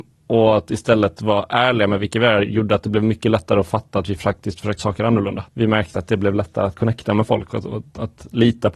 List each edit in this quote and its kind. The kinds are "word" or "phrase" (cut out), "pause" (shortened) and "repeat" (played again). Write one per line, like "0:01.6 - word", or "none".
0:04.8 - word
0:05.5 - pause